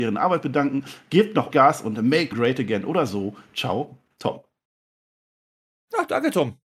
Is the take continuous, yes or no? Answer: no